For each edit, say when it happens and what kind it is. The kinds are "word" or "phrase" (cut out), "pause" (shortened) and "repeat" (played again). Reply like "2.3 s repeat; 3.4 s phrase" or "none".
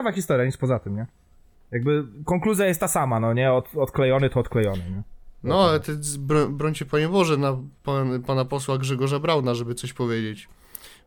1.5 s pause; 7.8 s pause